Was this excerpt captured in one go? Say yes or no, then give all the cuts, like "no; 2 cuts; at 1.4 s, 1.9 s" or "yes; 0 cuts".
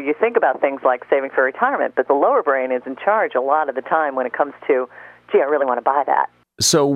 yes; 0 cuts